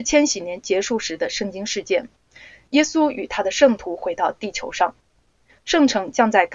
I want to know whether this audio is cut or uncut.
uncut